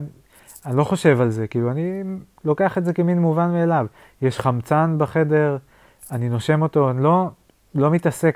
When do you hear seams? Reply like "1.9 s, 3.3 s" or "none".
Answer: 2.3 s